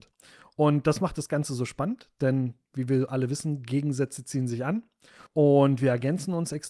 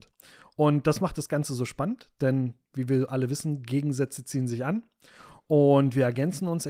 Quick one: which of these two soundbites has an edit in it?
first; 1 cut; at 5.3 s

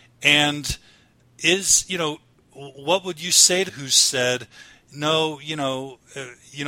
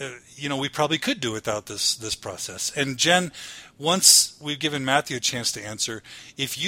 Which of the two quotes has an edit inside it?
first; 1 cut; at 3.7 s

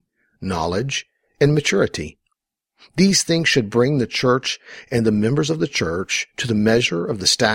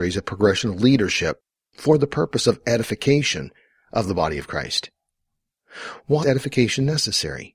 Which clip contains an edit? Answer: second; 1 cut; at 6.2 s

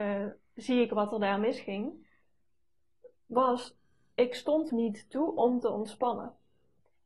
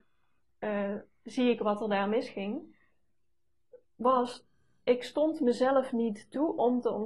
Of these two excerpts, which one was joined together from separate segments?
first; 1 cut; at 4.7 s

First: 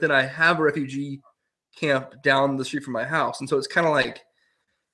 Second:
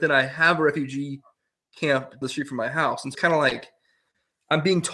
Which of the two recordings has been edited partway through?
second; 2 cuts; at 2.2 s, 3.1 s

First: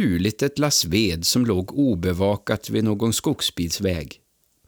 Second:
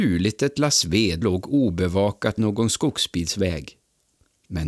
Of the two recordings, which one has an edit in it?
second; 2 cuts; at 1.2 s, 2.4 s

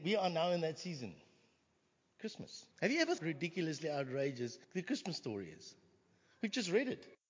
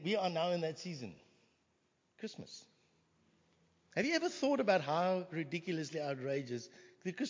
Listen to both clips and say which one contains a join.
first; 3 cuts; at 2.7 s, 3.2 s, 4.6 s

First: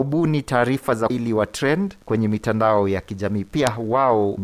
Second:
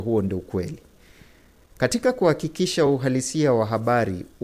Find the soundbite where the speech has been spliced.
first; 2 cuts; at 1.1 s, 2.0 s

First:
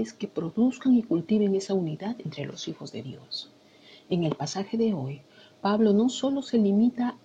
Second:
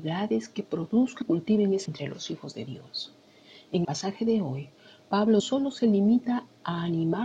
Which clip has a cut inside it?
second; 4 cuts; at 1.2 s, 1.9 s, 3.8 s, 5.4 s

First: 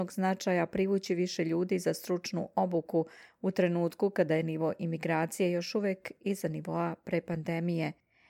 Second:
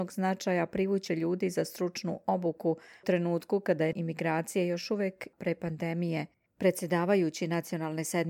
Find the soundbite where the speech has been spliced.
second; 5 cuts; at 1.1 s, 3.0 s, 3.9 s, 5.3 s, 6.5 s

